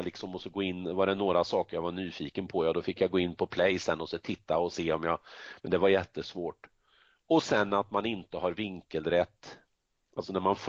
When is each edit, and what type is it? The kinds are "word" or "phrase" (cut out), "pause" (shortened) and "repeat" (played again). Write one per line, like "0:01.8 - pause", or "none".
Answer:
none

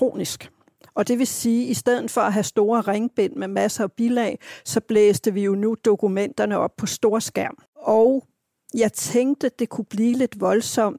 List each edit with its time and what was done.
0:07.7 - pause

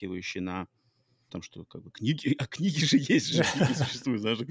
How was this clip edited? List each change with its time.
0:01.3 - word
0:01.9 - word
0:03.3 - word

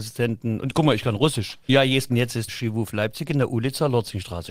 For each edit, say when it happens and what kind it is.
0:01.7 - word
0:02.1 - word
0:02.5 - word

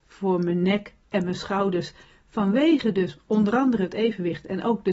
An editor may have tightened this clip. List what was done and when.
none

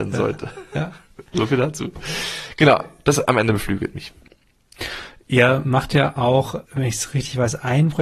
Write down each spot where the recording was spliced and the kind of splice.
0:06.6 - pause

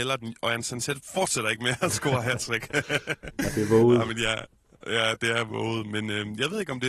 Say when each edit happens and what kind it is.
none

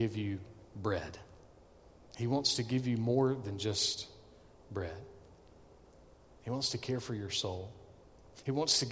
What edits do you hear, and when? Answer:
none

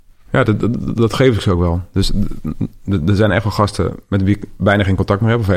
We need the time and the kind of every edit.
none

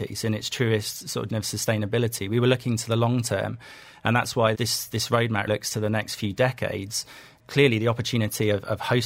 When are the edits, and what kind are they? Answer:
0:01.3 - word
0:04.5 - word
0:05.5 - word
0:07.4 - word

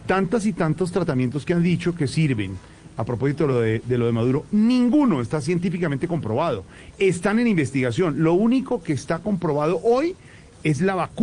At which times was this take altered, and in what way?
none

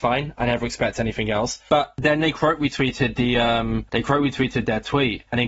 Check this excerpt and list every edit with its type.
none

